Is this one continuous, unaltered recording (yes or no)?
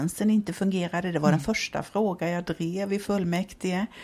yes